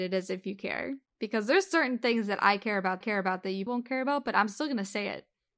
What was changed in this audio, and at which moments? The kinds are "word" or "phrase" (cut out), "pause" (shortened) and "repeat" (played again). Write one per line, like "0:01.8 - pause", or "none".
0:01.1 - pause
0:03.0 - repeat
0:03.7 - word